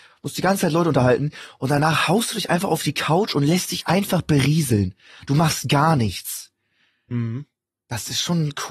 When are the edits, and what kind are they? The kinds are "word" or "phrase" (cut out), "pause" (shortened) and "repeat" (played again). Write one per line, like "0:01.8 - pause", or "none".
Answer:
none